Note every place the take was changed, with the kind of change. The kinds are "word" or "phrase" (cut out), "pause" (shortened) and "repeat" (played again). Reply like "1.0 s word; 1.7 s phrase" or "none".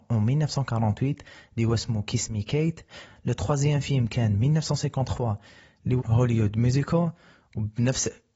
6.0 s word